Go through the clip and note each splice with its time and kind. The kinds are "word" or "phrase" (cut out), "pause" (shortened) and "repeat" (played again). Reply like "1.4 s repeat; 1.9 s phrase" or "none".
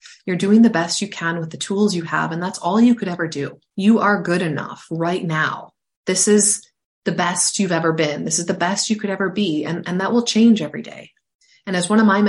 none

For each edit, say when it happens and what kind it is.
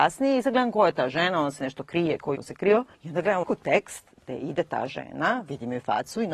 2.4 s phrase; 2.9 s pause; 3.4 s word

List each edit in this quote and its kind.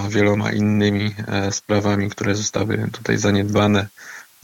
none

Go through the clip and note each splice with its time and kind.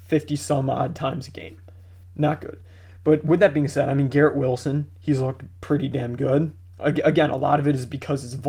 none

